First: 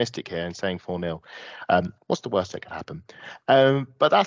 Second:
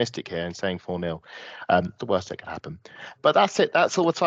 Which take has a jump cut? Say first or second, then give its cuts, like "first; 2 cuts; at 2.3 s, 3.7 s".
second; 2 cuts; at 2.0 s, 3.2 s